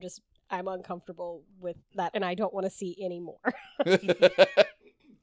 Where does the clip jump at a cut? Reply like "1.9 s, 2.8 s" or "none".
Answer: 1.8 s, 2.1 s